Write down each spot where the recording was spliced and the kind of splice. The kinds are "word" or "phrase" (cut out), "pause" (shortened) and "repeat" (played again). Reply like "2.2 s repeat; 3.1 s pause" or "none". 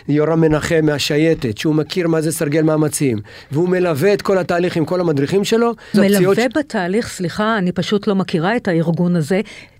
5.9 s word